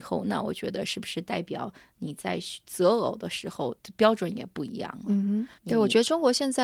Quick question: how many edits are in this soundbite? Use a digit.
1